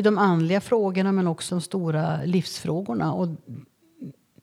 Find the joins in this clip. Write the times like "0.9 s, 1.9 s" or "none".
1.5 s